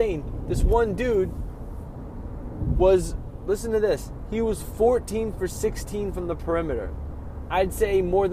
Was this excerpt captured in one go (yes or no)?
yes